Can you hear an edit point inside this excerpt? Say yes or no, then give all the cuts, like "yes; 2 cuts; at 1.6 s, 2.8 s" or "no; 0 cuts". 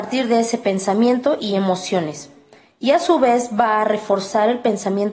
no; 0 cuts